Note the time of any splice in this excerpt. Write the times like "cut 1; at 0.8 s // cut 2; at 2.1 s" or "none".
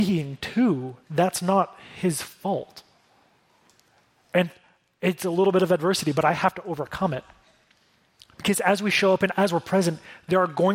none

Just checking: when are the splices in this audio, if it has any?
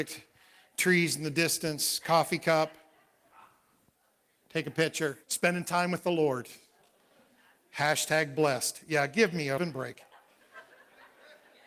cut 1; at 5.2 s // cut 2; at 9.6 s

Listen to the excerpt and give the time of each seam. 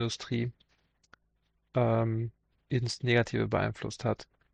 cut 1; at 2.5 s

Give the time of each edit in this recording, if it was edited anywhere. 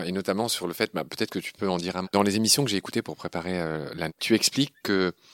cut 1; at 2.0 s // cut 2; at 4.1 s

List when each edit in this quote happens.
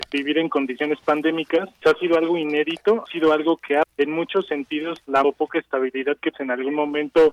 cut 1; at 1.8 s // cut 2; at 3.1 s // cut 3; at 3.8 s // cut 4; at 5.2 s // cut 5; at 6.3 s

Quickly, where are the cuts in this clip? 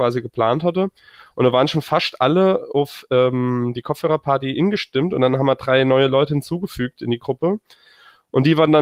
none

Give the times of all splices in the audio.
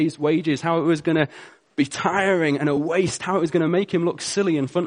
none

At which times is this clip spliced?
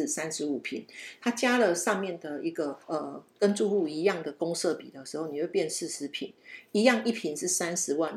cut 1; at 2.8 s

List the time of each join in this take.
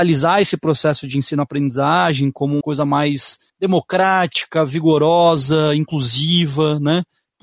cut 1; at 2.6 s // cut 2; at 3.5 s

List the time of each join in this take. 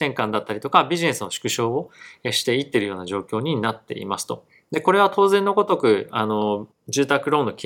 cut 1; at 6.7 s

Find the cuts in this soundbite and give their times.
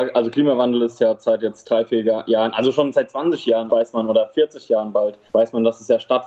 cut 1; at 3.7 s // cut 2; at 5.3 s

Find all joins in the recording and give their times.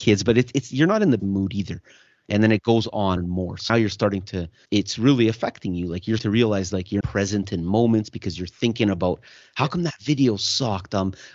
cut 1; at 1.2 s // cut 2; at 3.2 s // cut 3; at 3.7 s // cut 4; at 4.6 s // cut 5; at 6.2 s // cut 6; at 7.0 s

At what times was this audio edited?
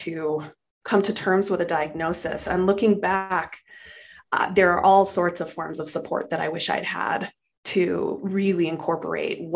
none

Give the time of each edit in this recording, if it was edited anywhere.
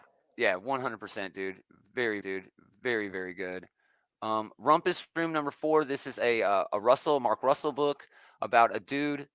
cut 1; at 2.2 s

